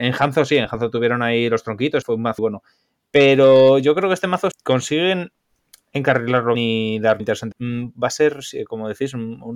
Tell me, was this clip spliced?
yes; 6 cuts; at 2.0 s, 2.4 s, 4.5 s, 6.5 s, 7.2 s, 7.5 s

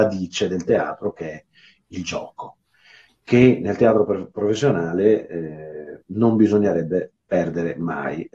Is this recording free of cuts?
yes; 0 cuts

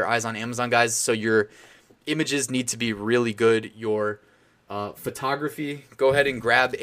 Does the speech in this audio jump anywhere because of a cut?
no; 0 cuts

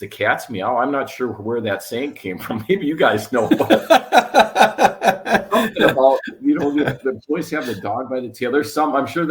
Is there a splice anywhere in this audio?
no; 0 cuts

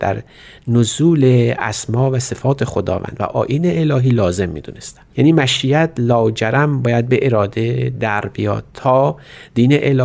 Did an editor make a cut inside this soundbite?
yes; 1 cut; at 5.1 s

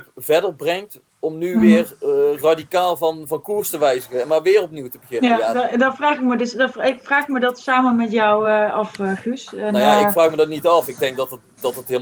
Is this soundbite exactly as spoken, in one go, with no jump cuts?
yes; 0 cuts

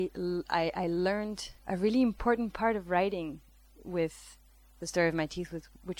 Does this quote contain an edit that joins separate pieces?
yes; 1 cut; at 1.6 s

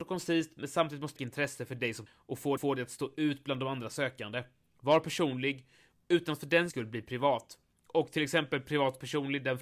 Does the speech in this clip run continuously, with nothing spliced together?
no; 4 cuts; at 1.2 s, 2.1 s, 2.6 s, 6.7 s

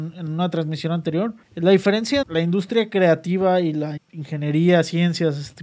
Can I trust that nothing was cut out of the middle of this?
no; 3 cuts; at 1.4 s, 2.2 s, 4.0 s

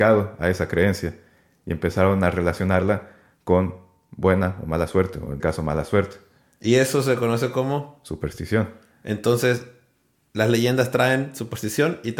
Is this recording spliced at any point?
yes; 1 cut; at 5.4 s

